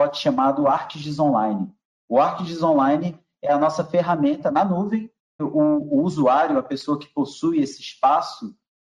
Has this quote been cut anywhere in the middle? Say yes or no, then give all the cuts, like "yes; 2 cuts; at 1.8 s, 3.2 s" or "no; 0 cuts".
yes; 1 cut; at 5.4 s